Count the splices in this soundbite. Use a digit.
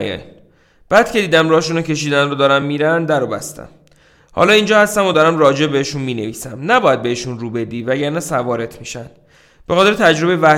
0